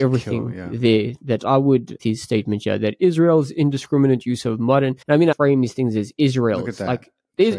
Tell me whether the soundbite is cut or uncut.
cut